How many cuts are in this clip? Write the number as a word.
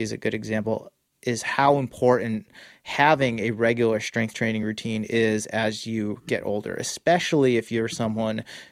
zero